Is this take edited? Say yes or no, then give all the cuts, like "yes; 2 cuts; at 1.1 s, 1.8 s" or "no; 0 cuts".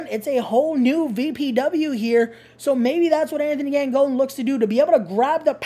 no; 0 cuts